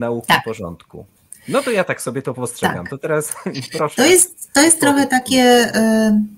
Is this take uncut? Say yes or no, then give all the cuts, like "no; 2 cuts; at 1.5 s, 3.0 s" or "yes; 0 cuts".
yes; 0 cuts